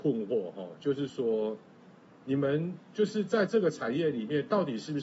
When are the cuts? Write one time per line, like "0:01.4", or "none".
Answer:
0:02.8